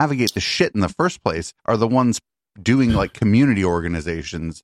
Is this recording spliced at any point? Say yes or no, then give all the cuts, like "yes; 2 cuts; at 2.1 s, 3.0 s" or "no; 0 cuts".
yes; 1 cut; at 1.6 s